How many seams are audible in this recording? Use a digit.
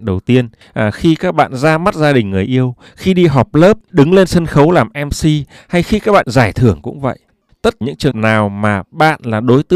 4